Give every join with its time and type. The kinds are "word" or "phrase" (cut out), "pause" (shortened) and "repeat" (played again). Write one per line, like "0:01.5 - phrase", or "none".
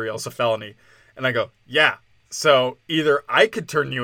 none

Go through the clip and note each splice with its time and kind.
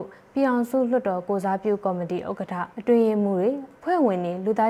0:02.7 - pause
0:03.8 - pause

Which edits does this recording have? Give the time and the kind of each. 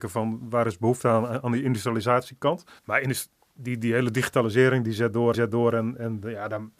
0:02.8 - pause
0:05.3 - repeat

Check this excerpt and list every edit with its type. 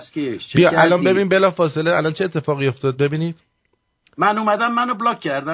none

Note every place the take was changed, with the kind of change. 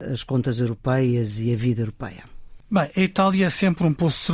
none

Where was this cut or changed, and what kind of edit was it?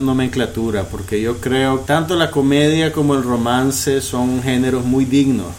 0:01.9 - word

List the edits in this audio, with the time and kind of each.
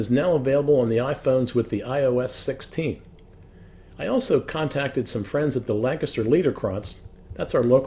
none

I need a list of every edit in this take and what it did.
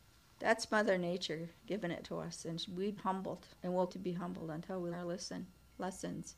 0:01.6 - pause
0:02.0 - word
0:03.0 - word
0:03.6 - pause
0:03.9 - word
0:04.9 - word

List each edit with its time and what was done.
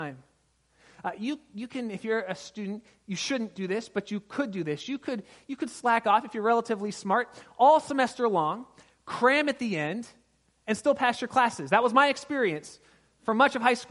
none

